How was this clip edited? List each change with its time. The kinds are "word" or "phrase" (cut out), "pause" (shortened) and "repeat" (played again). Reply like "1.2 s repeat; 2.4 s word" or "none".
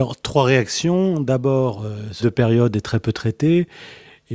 2.2 s word